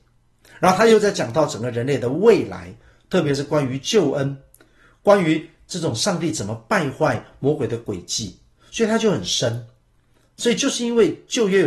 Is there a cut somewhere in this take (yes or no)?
no